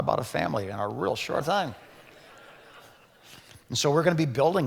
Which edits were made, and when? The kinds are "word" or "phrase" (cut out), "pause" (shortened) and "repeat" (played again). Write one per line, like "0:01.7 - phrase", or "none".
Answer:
0:01.4 - word